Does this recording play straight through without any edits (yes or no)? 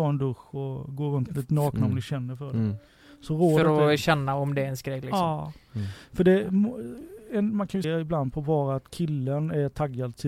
no